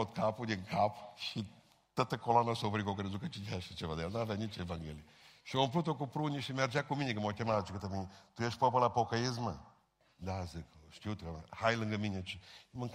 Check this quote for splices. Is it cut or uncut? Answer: uncut